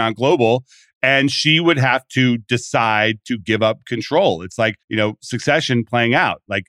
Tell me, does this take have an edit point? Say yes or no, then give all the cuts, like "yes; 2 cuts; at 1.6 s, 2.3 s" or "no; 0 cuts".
yes; 1 cut; at 4.8 s